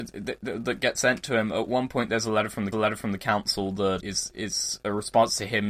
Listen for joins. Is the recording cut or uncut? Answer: cut